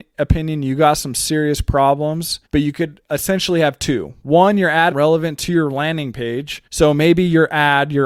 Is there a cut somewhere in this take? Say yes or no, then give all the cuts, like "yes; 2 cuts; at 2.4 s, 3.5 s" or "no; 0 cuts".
yes; 3 cuts; at 2.5 s, 4.9 s, 6.7 s